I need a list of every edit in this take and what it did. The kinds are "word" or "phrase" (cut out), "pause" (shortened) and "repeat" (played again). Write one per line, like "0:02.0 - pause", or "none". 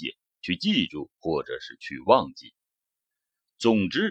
0:01.1 - pause